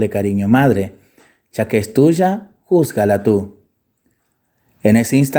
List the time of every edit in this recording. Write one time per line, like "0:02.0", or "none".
none